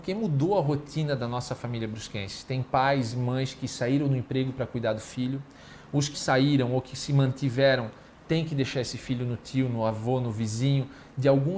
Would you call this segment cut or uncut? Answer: cut